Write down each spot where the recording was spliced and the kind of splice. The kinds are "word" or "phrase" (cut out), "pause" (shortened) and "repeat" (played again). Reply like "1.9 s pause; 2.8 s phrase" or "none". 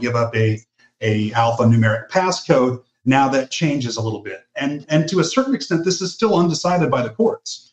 none